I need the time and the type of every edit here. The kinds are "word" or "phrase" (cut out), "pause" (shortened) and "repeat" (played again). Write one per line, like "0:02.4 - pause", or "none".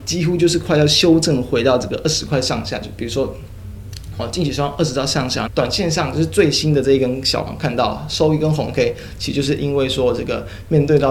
0:05.5 - phrase
0:07.5 - phrase